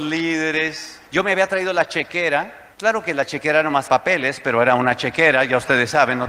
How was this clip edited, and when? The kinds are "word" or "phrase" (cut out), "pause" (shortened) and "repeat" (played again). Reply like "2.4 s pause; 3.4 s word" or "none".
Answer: 1.1 s pause; 2.7 s pause; 3.9 s word

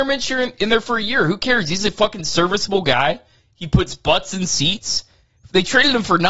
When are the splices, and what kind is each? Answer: none

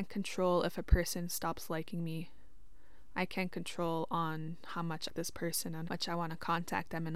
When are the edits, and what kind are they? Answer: 5.1 s phrase; 5.9 s word

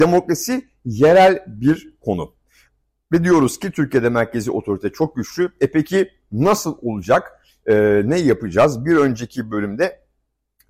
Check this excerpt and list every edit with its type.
none

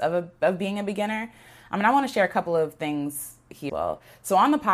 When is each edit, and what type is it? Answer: 3.7 s word

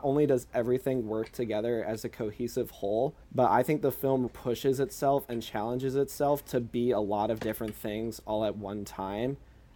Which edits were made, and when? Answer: 3.2 s pause; 4.3 s word

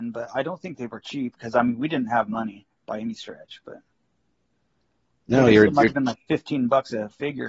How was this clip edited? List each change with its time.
none

